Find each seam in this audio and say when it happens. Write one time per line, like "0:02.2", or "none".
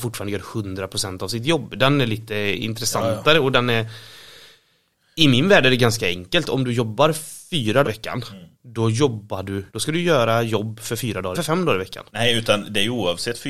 0:07.8
0:08.5
0:09.7
0:11.3
0:12.1